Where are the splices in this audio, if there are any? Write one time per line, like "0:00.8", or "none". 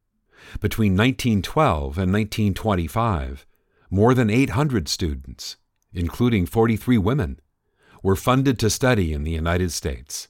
none